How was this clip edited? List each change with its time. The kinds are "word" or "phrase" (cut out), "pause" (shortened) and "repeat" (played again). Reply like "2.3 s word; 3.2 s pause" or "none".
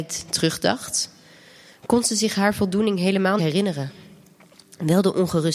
3.4 s word